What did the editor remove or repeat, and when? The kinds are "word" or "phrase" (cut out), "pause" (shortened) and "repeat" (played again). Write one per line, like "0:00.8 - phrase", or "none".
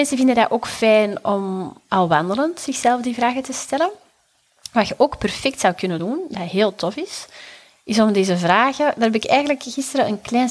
none